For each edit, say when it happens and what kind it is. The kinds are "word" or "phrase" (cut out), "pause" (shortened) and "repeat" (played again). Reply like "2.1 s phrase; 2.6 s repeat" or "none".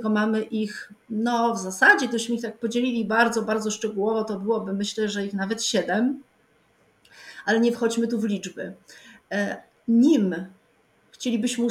none